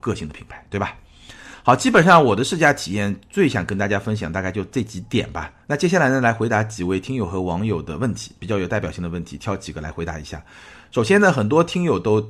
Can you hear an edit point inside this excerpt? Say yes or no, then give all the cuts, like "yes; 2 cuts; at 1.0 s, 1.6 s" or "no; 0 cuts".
yes; 1 cut; at 5.6 s